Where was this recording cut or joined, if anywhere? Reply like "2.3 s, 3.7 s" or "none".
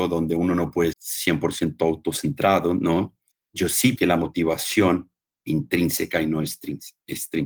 0.9 s, 3.3 s, 4.0 s, 5.4 s